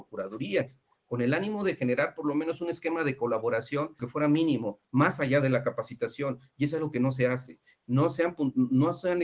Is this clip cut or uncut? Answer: cut